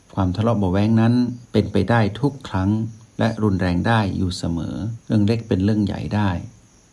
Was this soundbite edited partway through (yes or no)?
yes